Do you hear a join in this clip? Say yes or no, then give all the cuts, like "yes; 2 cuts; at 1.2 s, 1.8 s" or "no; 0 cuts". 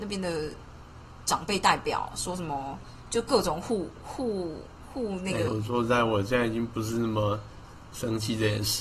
yes; 1 cut; at 5.5 s